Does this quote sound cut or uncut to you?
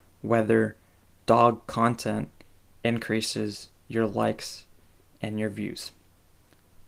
uncut